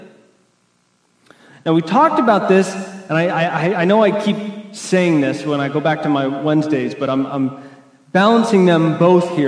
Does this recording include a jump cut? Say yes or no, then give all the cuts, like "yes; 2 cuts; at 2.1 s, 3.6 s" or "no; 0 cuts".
no; 0 cuts